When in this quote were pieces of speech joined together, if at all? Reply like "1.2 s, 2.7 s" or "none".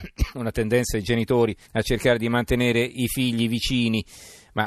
1.7 s